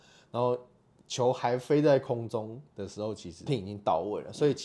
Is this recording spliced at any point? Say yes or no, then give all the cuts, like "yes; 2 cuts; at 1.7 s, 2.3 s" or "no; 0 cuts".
yes; 1 cut; at 3.5 s